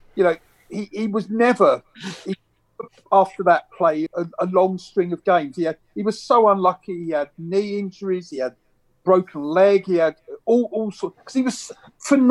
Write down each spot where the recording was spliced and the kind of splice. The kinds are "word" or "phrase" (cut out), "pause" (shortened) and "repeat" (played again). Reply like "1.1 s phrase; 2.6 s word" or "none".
4.1 s word